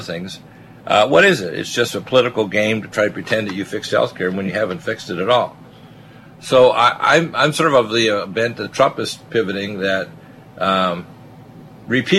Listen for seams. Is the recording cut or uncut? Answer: uncut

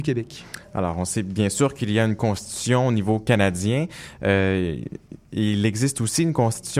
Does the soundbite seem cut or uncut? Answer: uncut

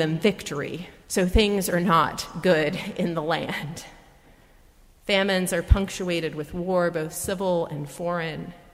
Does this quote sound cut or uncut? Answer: cut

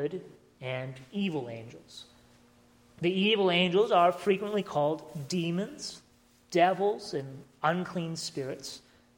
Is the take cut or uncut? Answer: uncut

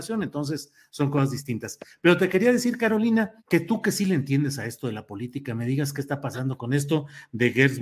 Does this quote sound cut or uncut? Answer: cut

